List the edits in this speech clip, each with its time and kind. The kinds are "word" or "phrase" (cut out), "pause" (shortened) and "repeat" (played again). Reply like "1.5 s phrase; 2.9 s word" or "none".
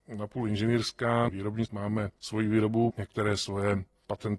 1.3 s word; 1.7 s word; 2.2 s pause; 2.9 s word

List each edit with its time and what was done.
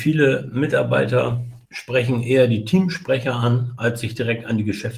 1.7 s pause

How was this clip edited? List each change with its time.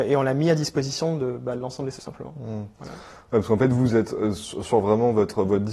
2.0 s word

